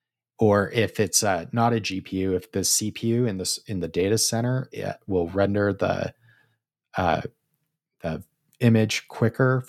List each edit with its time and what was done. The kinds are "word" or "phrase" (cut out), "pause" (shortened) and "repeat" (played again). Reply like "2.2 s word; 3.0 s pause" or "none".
none

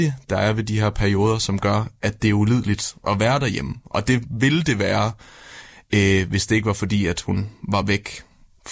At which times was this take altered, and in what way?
none

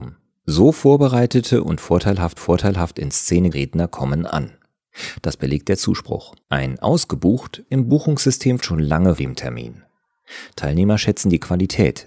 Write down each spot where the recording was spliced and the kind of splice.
2.4 s repeat; 3.5 s word; 6.4 s pause; 7.7 s word; 8.6 s phrase; 9.2 s word

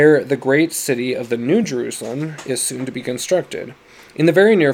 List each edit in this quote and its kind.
none

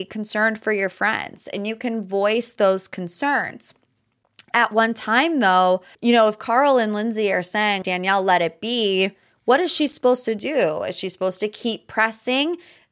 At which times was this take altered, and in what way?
5.9 s pause; 7.8 s word

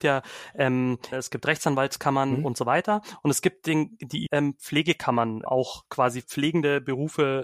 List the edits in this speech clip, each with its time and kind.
1.1 s word; 4.3 s word; 5.5 s word; 6.2 s word

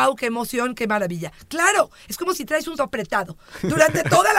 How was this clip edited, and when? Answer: 2.8 s word

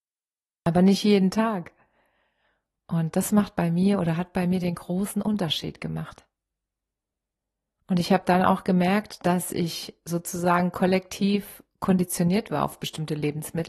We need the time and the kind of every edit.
none

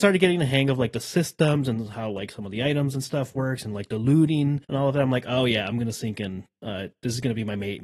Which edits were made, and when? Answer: 4.6 s pause

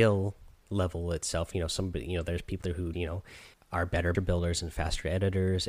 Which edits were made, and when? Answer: 2.6 s word; 2.9 s word; 3.5 s pause; 4.1 s phrase

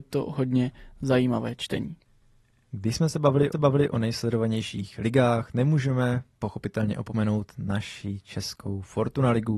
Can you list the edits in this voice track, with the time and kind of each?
3.5 s repeat

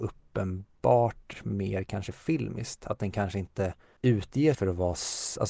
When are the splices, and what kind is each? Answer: 4.5 s word

